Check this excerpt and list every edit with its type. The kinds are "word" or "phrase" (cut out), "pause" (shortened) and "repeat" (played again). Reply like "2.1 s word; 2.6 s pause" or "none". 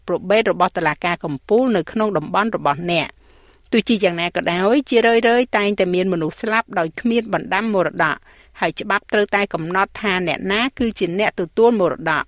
none